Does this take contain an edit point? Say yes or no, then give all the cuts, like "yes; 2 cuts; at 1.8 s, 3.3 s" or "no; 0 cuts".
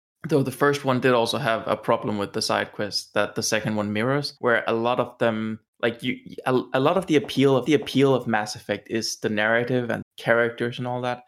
yes; 4 cuts; at 4.4 s, 5.7 s, 7.7 s, 10.0 s